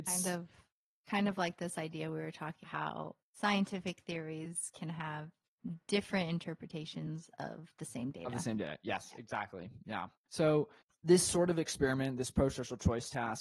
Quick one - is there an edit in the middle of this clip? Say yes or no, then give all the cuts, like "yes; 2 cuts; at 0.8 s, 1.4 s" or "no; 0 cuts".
yes; 2 cuts; at 2.6 s, 10.2 s